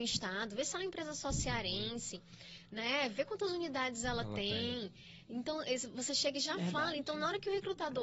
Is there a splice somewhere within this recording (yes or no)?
no